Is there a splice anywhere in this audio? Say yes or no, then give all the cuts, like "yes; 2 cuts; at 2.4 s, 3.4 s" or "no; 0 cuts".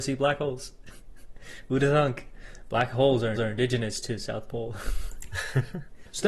yes; 1 cut; at 3.4 s